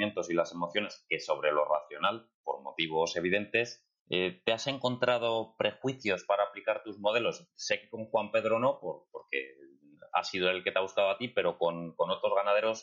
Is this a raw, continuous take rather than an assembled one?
no; 1 cut; at 4.0 s

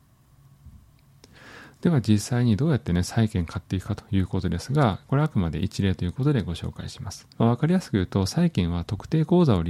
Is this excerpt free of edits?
no; 1 cut; at 7.3 s

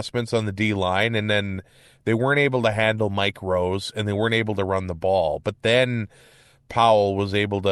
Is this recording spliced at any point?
no; 0 cuts

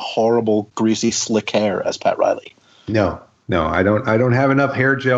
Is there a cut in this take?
no; 0 cuts

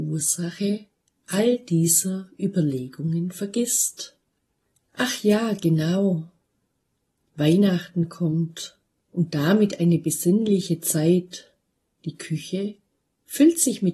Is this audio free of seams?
yes; 0 cuts

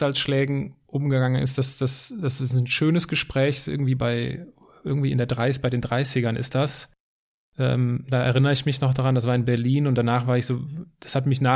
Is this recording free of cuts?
yes; 0 cuts

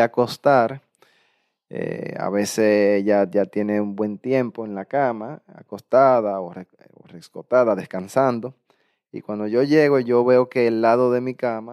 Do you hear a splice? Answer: no; 0 cuts

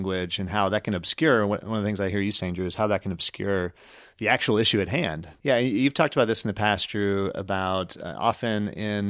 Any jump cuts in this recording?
no; 0 cuts

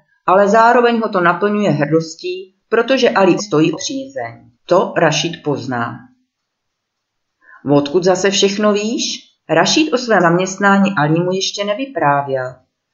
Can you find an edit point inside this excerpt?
yes; 6 cuts; at 2.6 s, 3.4 s, 3.7 s, 4.5 s, 9.4 s, 10.2 s

